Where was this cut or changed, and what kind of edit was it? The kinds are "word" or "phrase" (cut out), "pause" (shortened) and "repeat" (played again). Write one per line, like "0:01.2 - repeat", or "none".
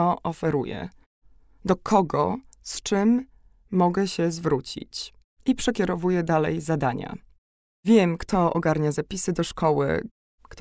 none